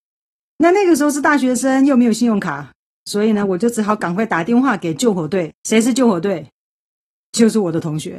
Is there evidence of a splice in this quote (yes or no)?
no